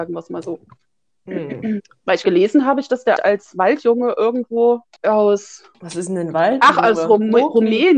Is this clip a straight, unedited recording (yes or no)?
no